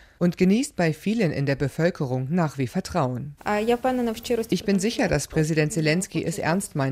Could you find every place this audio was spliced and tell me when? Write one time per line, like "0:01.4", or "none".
0:02.7